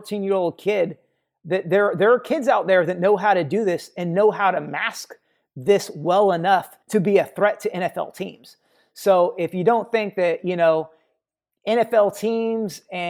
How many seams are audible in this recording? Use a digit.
1